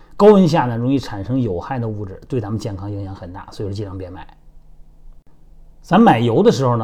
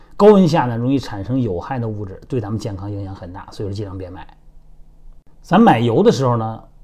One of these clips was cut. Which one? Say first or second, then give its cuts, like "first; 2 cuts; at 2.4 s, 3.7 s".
second; 1 cut; at 5.3 s